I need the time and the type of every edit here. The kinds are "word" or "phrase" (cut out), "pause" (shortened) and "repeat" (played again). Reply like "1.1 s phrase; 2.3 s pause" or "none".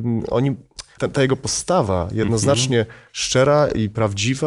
1.0 s word